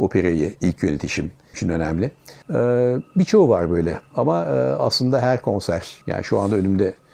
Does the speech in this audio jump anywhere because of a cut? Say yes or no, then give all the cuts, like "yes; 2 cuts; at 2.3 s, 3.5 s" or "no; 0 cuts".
yes; 3 cuts; at 1.5 s, 2.4 s, 6.0 s